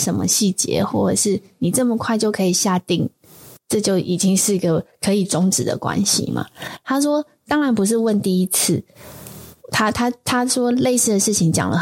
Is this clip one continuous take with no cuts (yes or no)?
no